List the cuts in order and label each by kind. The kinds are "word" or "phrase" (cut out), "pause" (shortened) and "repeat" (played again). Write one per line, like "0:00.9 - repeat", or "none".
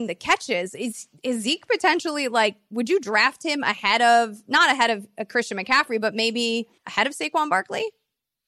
0:06.8 - pause